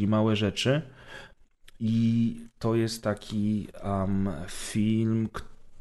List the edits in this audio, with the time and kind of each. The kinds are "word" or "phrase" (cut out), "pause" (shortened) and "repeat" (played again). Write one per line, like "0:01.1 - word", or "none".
none